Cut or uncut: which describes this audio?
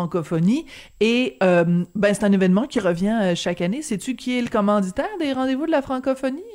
uncut